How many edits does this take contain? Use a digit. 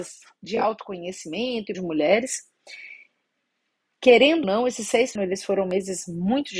3